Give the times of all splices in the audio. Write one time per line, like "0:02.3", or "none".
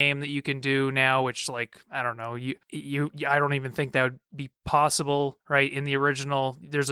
none